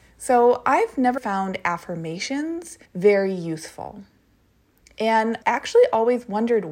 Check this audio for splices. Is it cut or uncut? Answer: cut